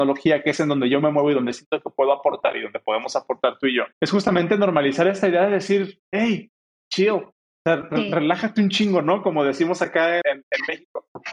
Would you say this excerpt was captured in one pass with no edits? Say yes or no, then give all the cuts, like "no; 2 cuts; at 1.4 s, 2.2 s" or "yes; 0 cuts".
no; 4 cuts; at 3.9 s, 6.0 s, 7.4 s, 10.2 s